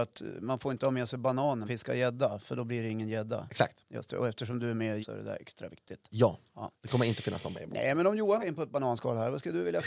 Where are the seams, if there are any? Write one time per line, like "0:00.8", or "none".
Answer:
0:01.7
0:05.0
0:07.5
0:08.4

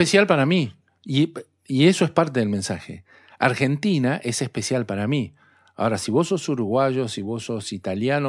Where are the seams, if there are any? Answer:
none

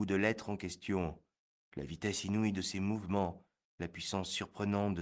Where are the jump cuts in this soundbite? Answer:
none

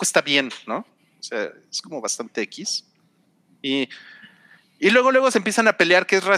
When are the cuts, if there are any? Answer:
none

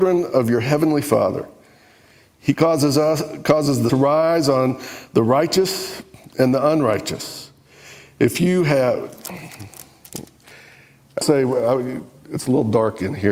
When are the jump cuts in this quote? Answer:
0:03.9
0:11.2

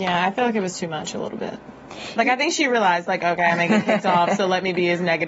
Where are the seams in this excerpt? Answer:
none

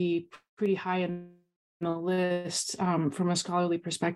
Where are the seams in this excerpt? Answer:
none

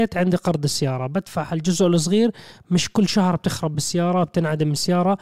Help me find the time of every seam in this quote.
none

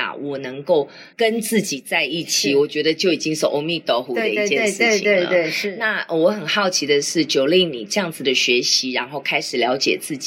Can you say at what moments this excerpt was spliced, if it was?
0:01.1

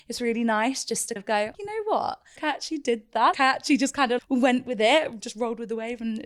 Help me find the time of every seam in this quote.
0:01.2
0:01.5
0:02.4
0:03.3
0:04.2
0:05.2

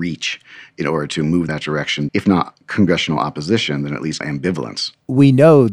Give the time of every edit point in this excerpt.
0:01.5
0:02.1
0:04.2

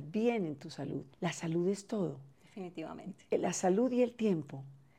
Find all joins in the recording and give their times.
0:01.1
0:02.3

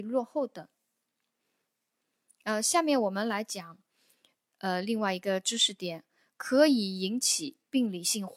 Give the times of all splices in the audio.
none

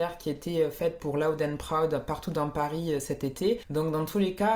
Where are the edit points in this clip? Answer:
none

